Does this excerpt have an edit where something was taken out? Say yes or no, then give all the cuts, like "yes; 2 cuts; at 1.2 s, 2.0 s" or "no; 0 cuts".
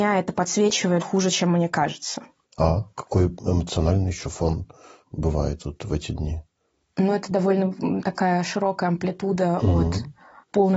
yes; 1 cut; at 1.0 s